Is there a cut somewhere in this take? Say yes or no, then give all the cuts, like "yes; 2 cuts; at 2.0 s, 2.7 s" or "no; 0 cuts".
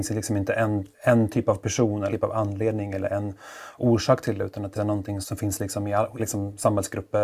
yes; 5 cuts; at 0.9 s, 2.1 s, 4.7 s, 5.2 s, 6.2 s